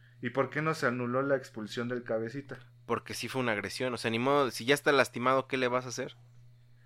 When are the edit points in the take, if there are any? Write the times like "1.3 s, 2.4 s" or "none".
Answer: none